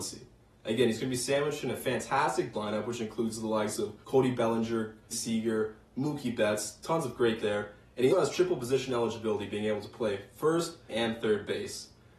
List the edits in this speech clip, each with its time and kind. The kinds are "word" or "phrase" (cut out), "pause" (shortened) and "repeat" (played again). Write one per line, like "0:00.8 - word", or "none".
0:02.5 - word
0:04.0 - pause
0:05.1 - phrase
0:07.4 - word
0:08.1 - word
0:10.9 - word